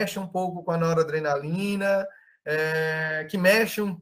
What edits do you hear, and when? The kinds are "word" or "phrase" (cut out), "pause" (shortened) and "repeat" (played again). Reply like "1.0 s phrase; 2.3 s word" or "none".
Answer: none